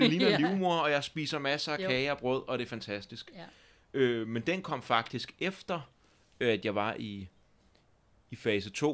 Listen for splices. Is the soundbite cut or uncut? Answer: uncut